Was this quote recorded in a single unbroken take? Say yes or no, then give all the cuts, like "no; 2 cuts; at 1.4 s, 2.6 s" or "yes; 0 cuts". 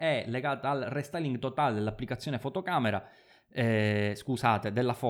yes; 0 cuts